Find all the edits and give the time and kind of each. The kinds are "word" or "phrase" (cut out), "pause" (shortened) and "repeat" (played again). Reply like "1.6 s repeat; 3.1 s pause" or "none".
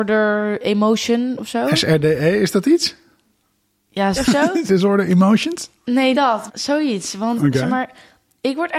4.2 s word; 4.7 s word; 6.1 s word; 6.5 s word